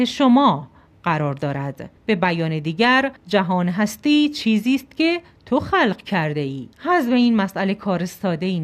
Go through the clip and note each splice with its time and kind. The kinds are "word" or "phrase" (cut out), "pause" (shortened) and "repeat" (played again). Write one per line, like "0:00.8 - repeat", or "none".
0:02.0 - pause
0:03.2 - pause
0:06.7 - pause